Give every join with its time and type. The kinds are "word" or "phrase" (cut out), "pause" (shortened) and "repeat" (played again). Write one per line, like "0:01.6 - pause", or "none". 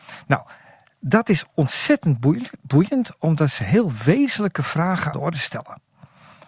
0:05.1 - word